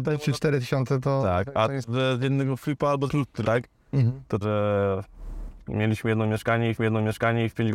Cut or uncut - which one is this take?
cut